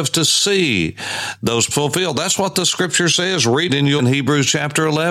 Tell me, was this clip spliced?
yes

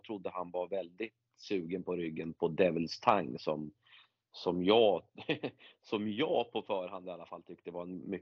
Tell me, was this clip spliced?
no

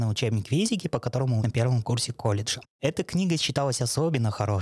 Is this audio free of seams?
no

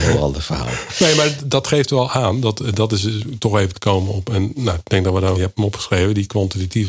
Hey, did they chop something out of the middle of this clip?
yes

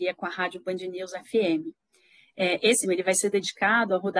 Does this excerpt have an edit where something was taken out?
yes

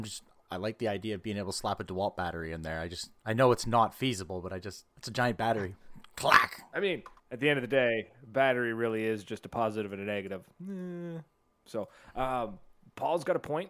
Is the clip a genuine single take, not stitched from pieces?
no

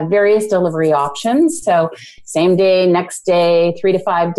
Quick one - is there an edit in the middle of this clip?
no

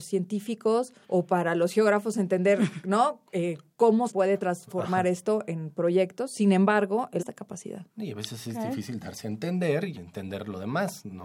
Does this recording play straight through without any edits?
no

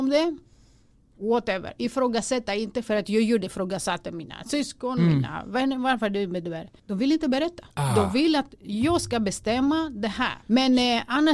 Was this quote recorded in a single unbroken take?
no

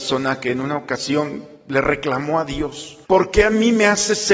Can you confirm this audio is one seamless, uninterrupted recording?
no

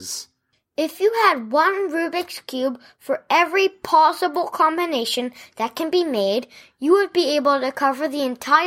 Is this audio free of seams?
yes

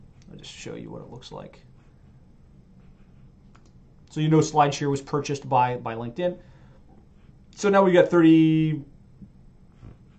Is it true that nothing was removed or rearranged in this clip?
yes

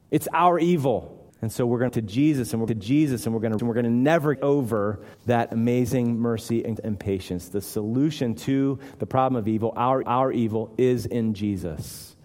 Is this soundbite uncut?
no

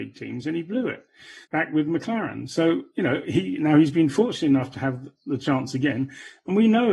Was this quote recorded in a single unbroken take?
no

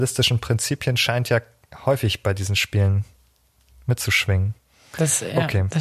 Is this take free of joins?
yes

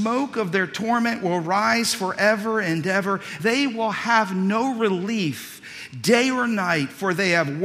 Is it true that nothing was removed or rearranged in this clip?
no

